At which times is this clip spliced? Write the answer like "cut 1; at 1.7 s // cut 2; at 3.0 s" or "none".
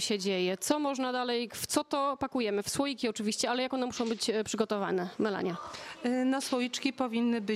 none